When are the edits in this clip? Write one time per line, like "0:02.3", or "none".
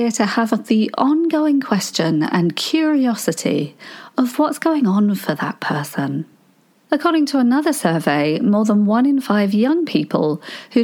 none

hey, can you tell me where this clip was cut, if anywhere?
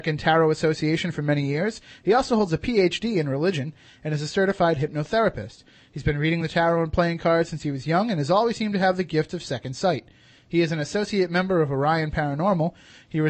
none

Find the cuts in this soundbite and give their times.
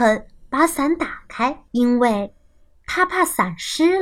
0:01.7

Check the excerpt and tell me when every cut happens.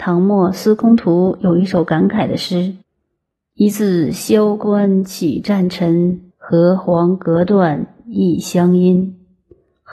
0:02.8
0:06.3

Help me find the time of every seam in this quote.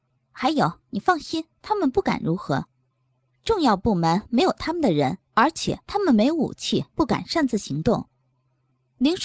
0:01.5
0:05.2
0:05.8
0:06.9

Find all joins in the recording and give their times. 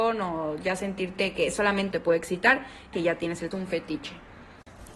0:01.9
0:02.9
0:03.5

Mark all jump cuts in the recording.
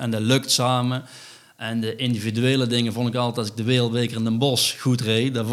none

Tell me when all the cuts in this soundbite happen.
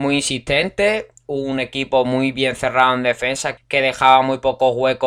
0:03.6

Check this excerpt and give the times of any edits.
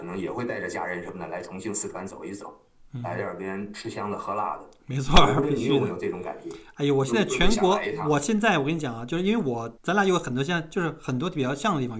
0:09.7

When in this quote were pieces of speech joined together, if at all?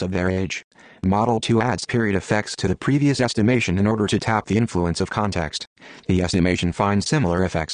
none

